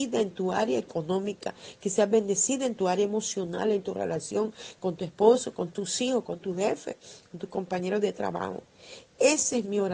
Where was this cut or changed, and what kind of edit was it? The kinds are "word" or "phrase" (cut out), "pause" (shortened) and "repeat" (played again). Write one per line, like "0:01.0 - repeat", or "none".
none

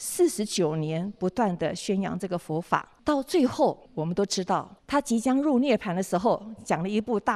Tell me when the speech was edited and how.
0:03.0 - pause
0:03.9 - pause
0:04.8 - pause

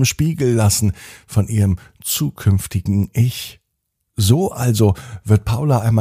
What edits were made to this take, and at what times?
none

